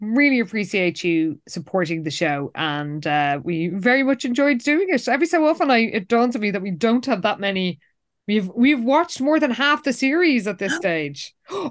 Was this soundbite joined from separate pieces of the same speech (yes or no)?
no